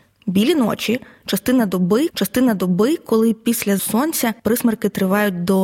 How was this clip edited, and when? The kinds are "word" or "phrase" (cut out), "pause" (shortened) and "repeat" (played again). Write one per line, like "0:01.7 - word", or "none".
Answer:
0:02.1 - repeat
0:03.8 - word
0:04.4 - pause

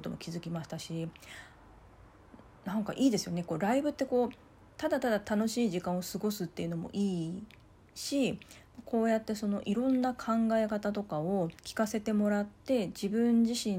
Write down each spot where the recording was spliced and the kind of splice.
0:11.6 - pause

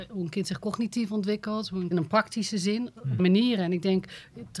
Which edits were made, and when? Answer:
0:01.9 - phrase
0:03.2 - word

